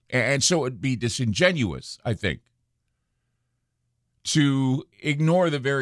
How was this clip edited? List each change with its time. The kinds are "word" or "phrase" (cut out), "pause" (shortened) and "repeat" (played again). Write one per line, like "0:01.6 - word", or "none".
0:04.9 - pause